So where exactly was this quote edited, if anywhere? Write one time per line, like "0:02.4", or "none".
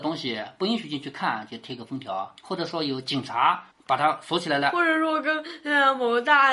0:02.4
0:03.7